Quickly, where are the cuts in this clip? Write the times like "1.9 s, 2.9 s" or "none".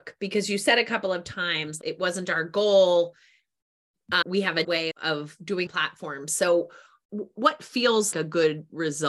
4.6 s, 5.7 s, 8.1 s